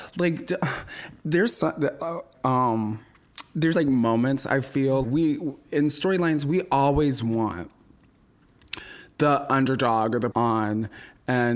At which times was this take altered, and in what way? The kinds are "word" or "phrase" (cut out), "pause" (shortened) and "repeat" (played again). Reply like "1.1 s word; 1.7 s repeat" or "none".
2.3 s word; 3.7 s word; 5.0 s word; 10.3 s phrase